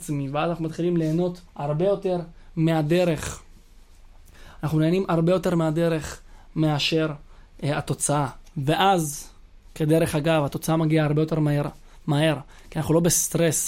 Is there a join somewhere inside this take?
yes; 1 cut; at 1.5 s

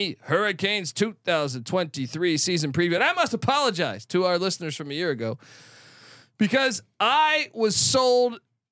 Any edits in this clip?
no; 0 cuts

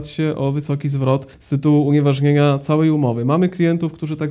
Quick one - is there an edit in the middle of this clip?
yes; 1 cut; at 1.3 s

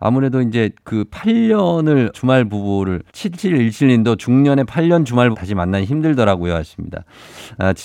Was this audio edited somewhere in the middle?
yes; 3 cuts; at 2.1 s, 3.1 s, 5.3 s

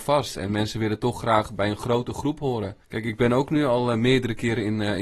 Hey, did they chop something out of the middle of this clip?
yes; 1 cut; at 2.8 s

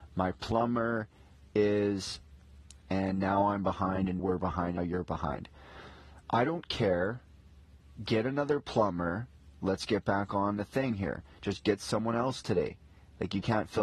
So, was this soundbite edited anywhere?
yes; 3 cuts; at 2.8 s, 4.2 s, 4.8 s

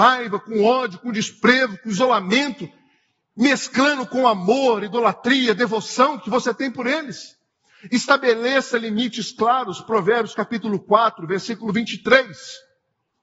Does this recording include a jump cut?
no; 0 cuts

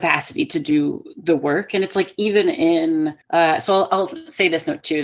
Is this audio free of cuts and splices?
no; 1 cut; at 3.2 s

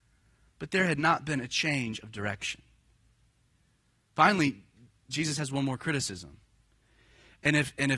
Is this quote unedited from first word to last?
yes; 0 cuts

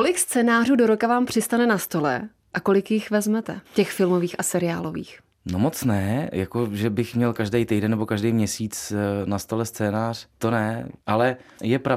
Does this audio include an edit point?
yes; 1 cut; at 3.7 s

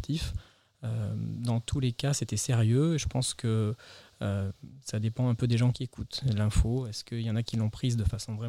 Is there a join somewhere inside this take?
no; 0 cuts

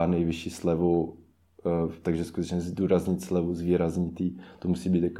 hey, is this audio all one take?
yes; 0 cuts

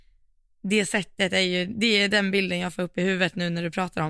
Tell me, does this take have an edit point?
no; 0 cuts

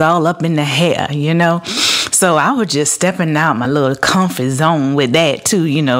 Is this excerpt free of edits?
yes; 0 cuts

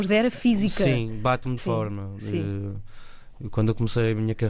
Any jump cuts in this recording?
yes; 1 cut; at 1.6 s

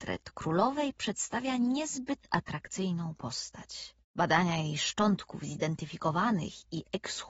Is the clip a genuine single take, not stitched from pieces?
no; 1 cut; at 4.0 s

